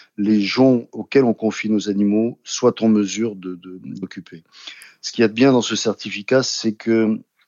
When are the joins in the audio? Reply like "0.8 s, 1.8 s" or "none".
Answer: 4.0 s